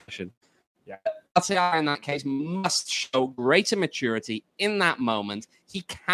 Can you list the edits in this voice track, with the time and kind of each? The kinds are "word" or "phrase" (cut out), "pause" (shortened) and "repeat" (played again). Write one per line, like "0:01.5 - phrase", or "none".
none